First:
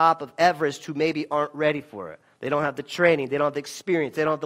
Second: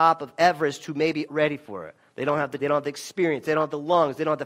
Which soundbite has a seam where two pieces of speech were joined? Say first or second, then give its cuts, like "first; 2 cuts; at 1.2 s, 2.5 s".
second; 2 cuts; at 1.3 s, 2.6 s